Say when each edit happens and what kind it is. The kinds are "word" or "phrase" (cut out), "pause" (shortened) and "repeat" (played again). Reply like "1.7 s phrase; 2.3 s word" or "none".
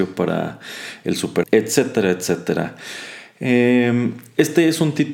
1.4 s word